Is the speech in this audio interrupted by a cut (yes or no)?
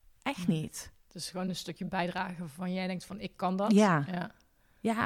no